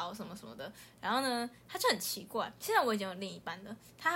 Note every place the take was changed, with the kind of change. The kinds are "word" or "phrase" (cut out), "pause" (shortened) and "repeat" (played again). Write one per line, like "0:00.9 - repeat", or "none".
0:02.6 - pause